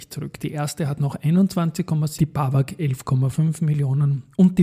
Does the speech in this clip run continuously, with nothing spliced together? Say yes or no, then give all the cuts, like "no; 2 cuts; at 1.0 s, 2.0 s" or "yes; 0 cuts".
no; 1 cut; at 2.2 s